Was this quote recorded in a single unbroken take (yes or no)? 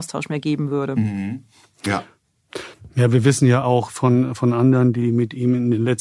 yes